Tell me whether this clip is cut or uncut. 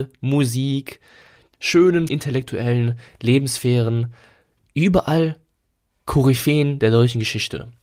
cut